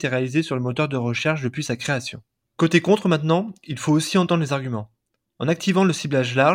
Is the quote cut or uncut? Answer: uncut